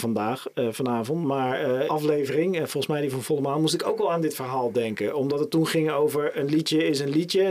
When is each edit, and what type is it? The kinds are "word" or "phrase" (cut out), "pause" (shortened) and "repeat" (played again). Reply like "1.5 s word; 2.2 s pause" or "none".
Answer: 1.9 s phrase